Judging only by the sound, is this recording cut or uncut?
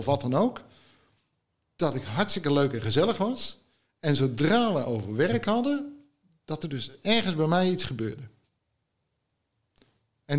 uncut